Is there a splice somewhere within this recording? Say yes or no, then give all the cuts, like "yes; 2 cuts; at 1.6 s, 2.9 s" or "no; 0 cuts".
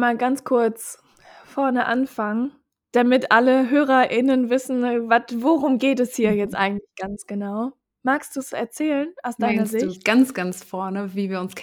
no; 0 cuts